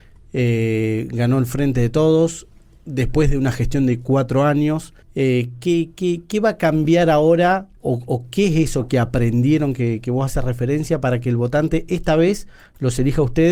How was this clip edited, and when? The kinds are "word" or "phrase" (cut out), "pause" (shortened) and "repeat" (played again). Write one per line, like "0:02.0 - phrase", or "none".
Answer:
0:05.0 - pause
0:07.8 - pause